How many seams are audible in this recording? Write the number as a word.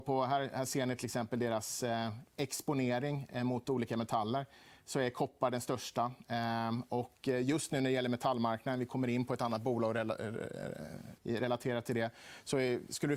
one